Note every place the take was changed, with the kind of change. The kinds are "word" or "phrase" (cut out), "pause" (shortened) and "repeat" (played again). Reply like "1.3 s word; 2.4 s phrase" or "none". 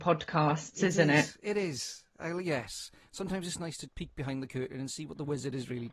3.9 s word